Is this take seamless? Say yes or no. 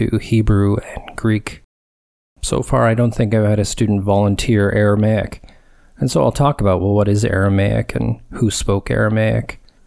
yes